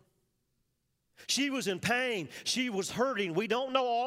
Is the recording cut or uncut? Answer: uncut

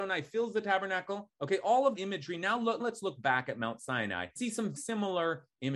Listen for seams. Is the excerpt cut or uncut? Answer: cut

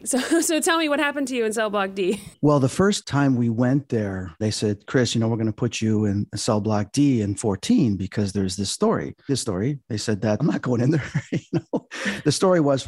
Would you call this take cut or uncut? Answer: cut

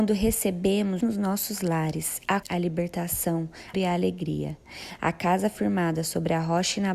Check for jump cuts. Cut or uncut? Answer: cut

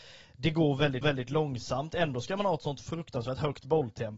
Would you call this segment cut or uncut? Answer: cut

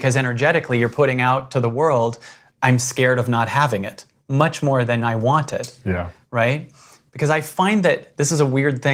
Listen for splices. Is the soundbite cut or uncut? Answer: uncut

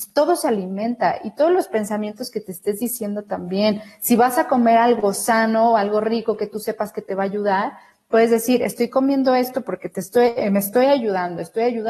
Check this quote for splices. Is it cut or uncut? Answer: uncut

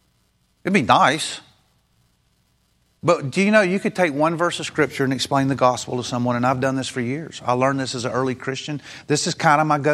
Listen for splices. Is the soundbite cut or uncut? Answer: uncut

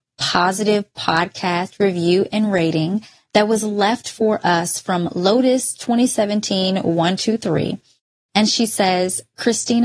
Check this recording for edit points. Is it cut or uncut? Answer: uncut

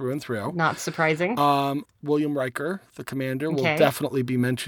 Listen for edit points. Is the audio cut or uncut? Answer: cut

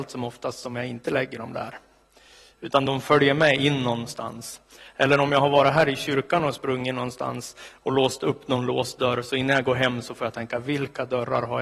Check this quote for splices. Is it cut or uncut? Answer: uncut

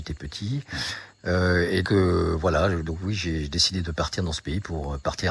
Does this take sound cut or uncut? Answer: cut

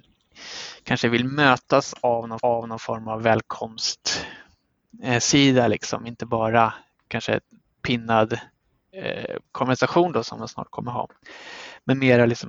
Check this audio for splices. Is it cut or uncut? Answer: cut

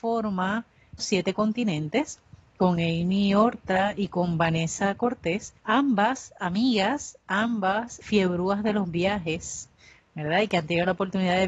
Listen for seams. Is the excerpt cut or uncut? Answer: cut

